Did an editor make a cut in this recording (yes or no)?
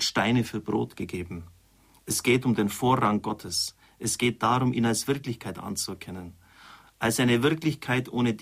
no